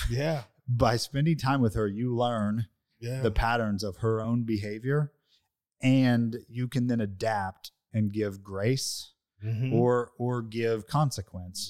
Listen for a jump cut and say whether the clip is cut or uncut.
uncut